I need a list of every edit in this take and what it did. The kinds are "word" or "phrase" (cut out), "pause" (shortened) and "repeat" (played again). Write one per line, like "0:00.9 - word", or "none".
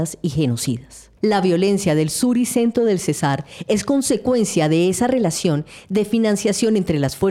none

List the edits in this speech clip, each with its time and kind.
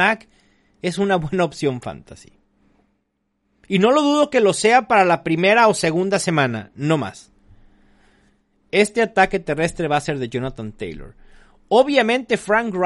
none

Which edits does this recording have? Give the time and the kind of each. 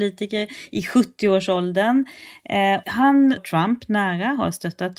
0:02.8 - word
0:03.4 - word

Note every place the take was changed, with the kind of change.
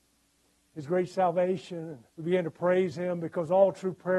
0:02.1 - pause

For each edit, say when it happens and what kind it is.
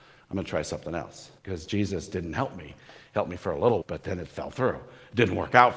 0:01.4 - pause
0:03.8 - word

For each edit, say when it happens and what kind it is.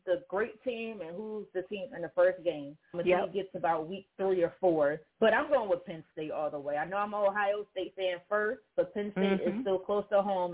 0:01.7 - word
0:02.9 - word
0:05.1 - pause
0:08.7 - pause

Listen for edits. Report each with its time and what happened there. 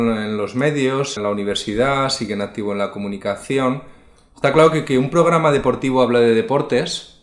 0:01.2 - word

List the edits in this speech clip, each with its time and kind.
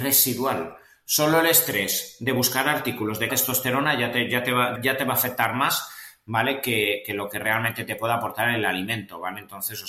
0:03.3 - phrase
0:04.8 - word

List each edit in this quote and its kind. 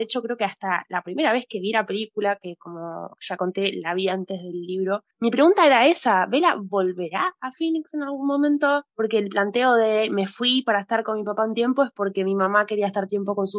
0:05.1 - pause
0:08.9 - pause

